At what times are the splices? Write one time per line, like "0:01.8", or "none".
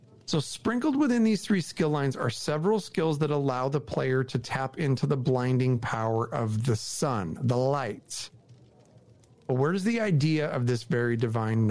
none